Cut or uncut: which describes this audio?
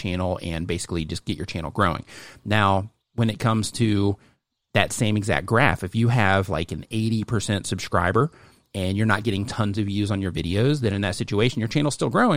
uncut